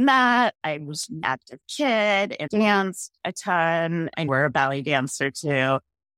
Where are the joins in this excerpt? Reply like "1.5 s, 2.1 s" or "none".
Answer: 1.2 s, 2.5 s, 4.3 s

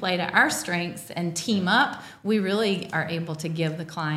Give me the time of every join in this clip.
none

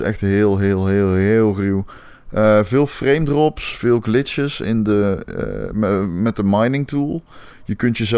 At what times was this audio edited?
none

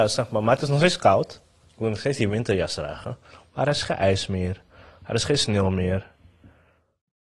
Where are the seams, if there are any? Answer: none

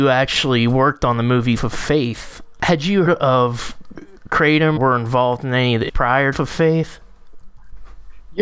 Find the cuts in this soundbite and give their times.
1.6 s, 3.1 s, 4.8 s, 5.9 s, 6.3 s

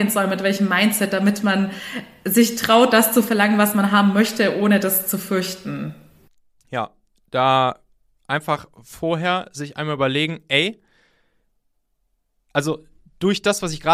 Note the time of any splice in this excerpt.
none

